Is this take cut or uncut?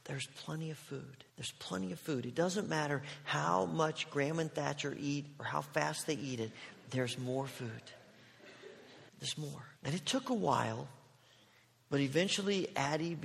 cut